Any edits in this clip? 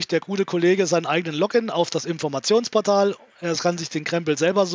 no; 0 cuts

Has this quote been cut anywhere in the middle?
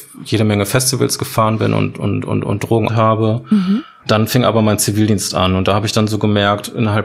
yes; 1 cut; at 2.9 s

